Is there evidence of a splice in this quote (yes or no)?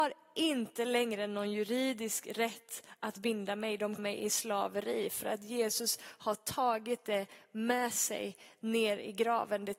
yes